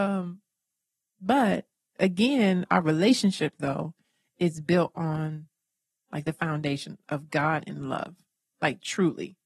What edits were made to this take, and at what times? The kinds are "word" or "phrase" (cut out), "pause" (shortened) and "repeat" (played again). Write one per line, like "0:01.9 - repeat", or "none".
none